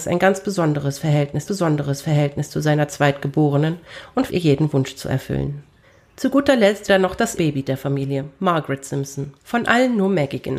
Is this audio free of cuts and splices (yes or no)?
no